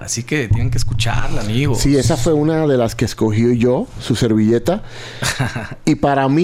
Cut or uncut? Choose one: uncut